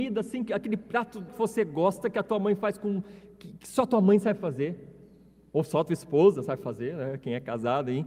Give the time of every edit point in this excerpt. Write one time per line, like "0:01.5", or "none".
0:01.3

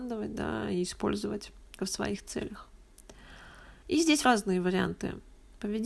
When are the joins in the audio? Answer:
0:01.8
0:03.8
0:04.2

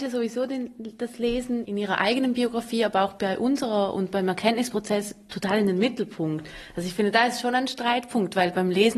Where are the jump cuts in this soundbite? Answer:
0:01.7

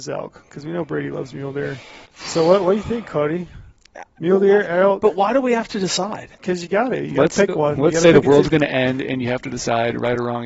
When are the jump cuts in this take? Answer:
0:02.1
0:06.3

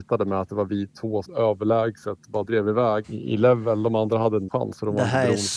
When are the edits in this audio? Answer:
0:01.2
0:02.5
0:03.0
0:04.5

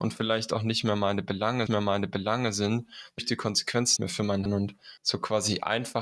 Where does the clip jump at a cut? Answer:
0:01.7
0:03.2
0:04.0
0:04.5
0:05.0

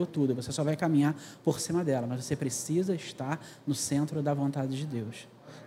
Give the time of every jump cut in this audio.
none

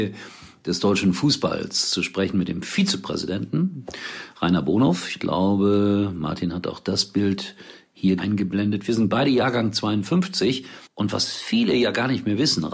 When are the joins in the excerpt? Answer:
0:08.2
0:10.9

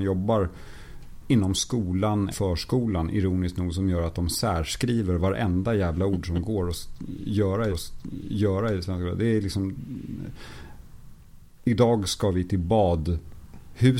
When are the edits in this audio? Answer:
0:02.3
0:07.7

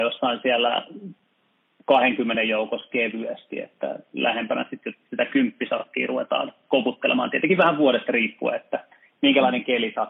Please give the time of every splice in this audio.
none

